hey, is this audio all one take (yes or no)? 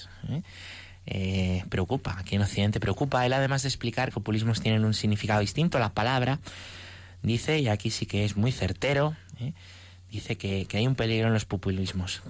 no